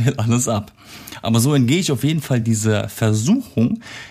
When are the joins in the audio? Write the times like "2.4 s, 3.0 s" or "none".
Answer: none